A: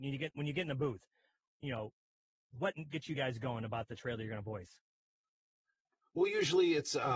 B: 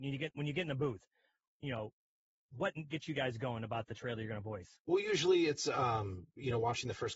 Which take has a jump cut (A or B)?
B